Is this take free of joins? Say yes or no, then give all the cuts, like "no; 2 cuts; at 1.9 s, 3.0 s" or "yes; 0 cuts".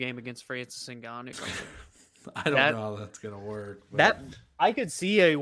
no; 1 cut; at 1.3 s